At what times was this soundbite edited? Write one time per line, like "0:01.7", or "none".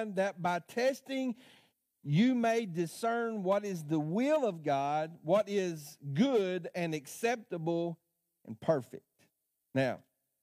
none